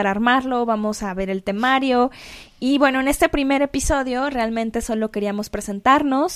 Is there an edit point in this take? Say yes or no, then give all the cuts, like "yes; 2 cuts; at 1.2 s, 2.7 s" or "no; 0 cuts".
no; 0 cuts